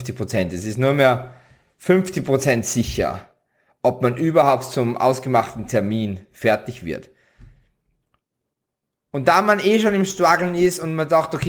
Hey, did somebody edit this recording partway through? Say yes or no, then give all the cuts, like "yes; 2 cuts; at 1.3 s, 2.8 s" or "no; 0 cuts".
no; 0 cuts